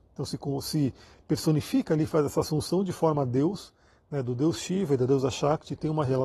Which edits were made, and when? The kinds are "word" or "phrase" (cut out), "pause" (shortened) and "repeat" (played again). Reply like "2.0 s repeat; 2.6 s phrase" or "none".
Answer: none